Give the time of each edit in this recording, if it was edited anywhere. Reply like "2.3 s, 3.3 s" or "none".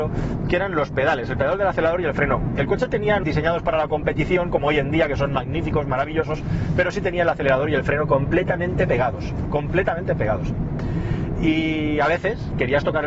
3.2 s